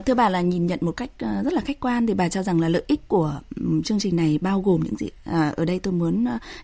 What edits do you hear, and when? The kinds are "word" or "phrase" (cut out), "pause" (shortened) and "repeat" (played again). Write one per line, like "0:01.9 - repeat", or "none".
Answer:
none